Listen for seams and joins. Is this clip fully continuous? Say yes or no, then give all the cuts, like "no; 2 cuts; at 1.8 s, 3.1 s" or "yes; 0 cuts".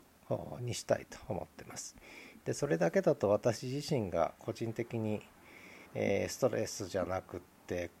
no; 1 cut; at 5.9 s